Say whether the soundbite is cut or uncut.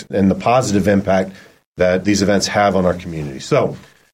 uncut